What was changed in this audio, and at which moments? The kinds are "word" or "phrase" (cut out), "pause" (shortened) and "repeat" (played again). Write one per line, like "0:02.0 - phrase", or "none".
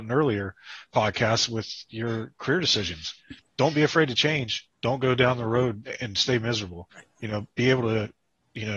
0:03.5 - pause
0:04.7 - pause
0:06.9 - pause